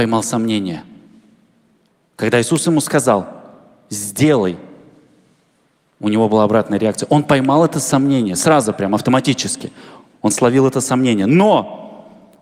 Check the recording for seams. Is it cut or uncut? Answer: uncut